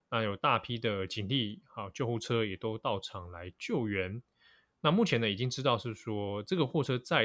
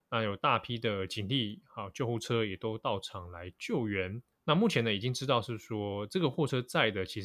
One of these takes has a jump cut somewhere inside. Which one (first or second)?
second